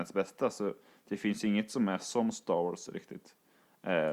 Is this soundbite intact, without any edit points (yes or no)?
yes